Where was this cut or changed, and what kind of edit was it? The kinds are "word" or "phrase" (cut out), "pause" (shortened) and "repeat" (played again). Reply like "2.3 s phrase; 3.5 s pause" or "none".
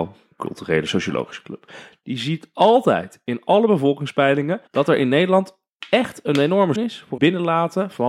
4.7 s pause; 6.8 s word; 7.2 s word